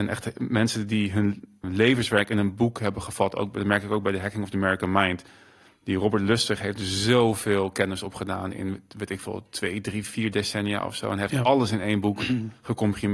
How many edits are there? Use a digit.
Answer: 1